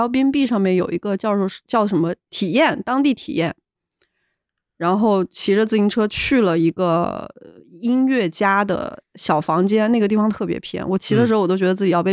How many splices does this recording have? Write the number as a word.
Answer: zero